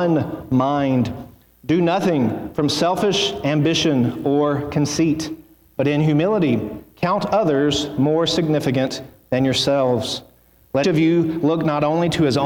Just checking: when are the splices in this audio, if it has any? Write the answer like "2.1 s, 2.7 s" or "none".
10.8 s